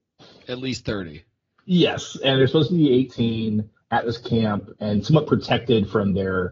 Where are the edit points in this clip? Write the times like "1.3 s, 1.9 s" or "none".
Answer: none